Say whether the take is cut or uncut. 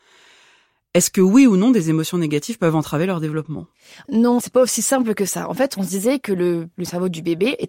uncut